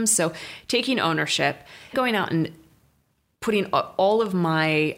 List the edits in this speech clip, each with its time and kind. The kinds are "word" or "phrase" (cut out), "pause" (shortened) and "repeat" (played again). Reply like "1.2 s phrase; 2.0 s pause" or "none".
1.9 s word